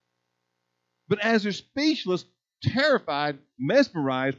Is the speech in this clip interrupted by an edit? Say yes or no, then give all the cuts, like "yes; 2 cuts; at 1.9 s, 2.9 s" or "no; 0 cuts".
no; 0 cuts